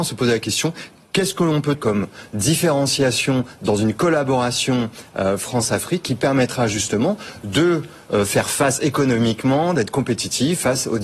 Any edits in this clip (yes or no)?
yes